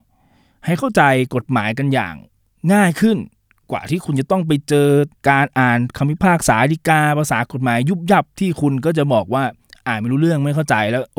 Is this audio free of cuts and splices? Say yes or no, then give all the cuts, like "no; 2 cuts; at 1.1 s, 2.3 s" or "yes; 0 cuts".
no; 1 cut; at 5.2 s